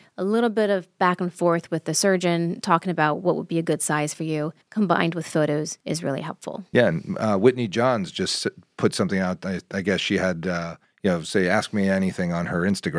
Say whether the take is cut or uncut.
cut